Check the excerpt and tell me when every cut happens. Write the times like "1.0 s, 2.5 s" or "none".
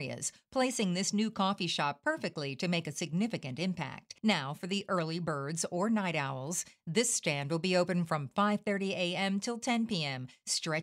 4.2 s